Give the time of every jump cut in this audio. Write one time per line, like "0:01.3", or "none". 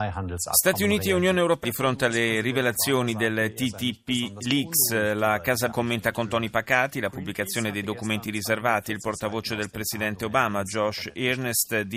0:01.6
0:05.7